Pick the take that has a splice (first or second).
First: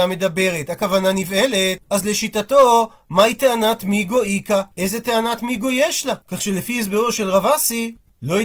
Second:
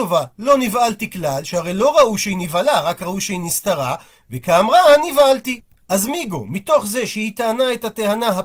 first